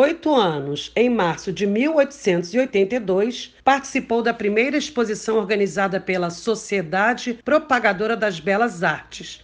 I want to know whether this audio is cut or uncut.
cut